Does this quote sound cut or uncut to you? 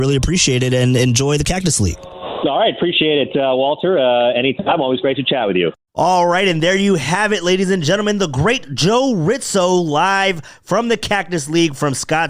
uncut